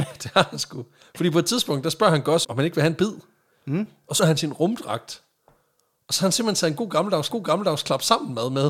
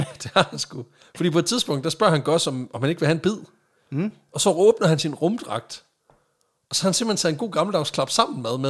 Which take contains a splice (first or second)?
first